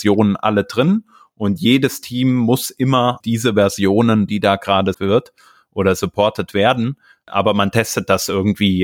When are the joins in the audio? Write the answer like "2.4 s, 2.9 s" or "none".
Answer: 3.2 s, 4.3 s, 4.9 s